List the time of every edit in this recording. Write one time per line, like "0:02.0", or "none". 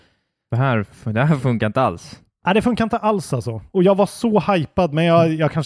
none